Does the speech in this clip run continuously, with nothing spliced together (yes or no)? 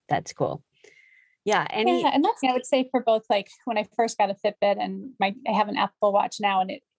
no